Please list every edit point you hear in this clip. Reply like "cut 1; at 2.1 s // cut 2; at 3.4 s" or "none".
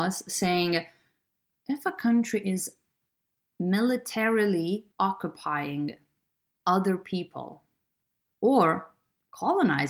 cut 1; at 4.9 s